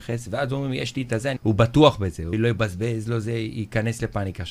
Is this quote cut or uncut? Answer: cut